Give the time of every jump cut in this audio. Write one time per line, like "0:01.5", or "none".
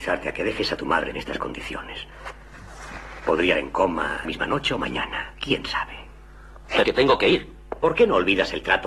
0:01.1
0:03.5
0:04.2
0:06.8